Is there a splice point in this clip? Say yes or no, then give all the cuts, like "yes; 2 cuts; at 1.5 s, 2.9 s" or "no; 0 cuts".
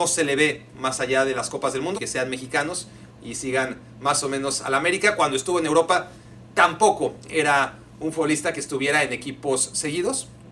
yes; 1 cut; at 1.9 s